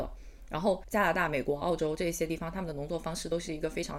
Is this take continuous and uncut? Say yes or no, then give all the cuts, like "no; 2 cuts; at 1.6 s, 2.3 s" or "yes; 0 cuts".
yes; 0 cuts